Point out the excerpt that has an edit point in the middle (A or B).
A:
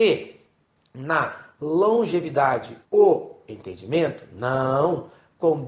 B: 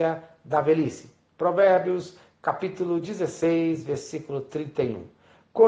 A